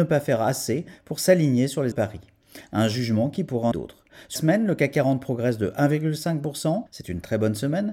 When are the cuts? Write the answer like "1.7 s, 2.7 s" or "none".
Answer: 1.9 s, 3.7 s, 4.4 s, 6.9 s